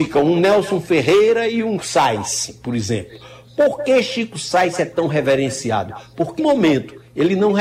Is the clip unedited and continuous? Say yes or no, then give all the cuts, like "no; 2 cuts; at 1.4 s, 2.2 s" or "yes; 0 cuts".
no; 2 cuts; at 1.8 s, 6.4 s